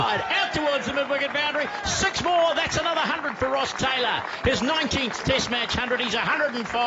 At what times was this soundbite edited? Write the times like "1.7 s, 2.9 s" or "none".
none